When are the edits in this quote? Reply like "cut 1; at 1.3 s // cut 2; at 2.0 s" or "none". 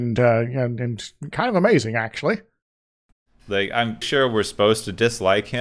cut 1; at 4.0 s